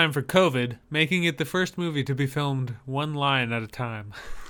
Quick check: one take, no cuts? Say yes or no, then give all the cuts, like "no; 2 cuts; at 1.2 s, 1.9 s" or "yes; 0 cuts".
yes; 0 cuts